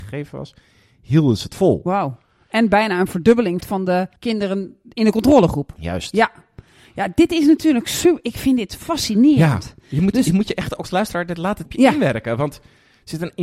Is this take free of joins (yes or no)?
no